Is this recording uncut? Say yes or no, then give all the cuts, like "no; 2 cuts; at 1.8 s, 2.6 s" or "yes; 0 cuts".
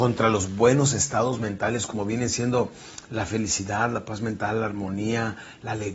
yes; 0 cuts